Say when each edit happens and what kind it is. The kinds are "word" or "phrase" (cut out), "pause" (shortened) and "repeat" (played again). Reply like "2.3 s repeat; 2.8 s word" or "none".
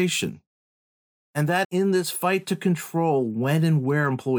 1.6 s word

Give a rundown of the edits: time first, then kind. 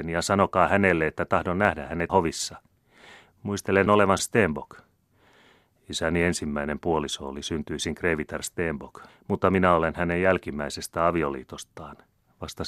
2.1 s word; 3.9 s word; 4.2 s phrase; 9.1 s pause

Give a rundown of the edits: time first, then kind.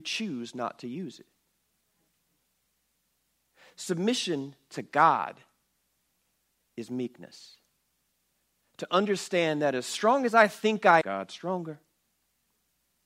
11.0 s word

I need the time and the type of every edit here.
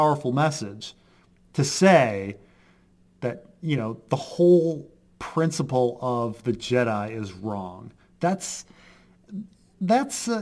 none

